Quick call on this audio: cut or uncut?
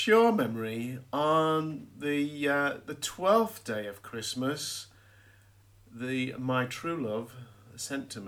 uncut